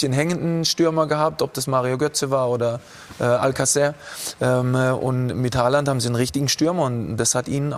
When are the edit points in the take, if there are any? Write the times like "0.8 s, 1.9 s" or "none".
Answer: none